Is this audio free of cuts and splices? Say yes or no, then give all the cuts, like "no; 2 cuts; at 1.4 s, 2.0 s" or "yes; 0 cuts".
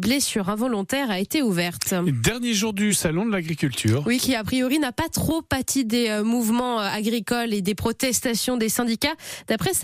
yes; 0 cuts